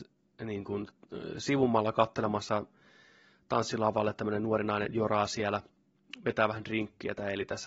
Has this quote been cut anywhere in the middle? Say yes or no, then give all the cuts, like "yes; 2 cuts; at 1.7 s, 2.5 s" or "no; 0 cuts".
no; 0 cuts